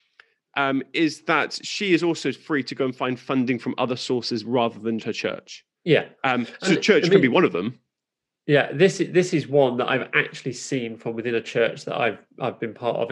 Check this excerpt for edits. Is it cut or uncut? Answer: cut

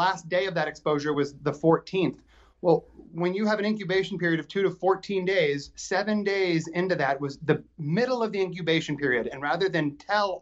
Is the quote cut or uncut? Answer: uncut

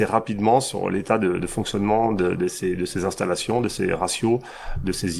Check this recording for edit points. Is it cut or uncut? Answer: uncut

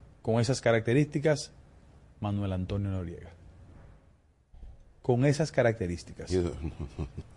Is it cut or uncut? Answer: uncut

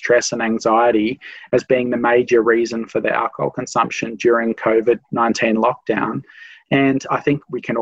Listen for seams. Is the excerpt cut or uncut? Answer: uncut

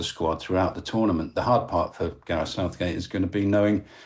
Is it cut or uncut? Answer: uncut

